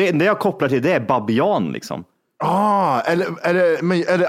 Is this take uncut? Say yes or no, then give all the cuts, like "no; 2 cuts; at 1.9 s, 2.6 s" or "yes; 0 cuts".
yes; 0 cuts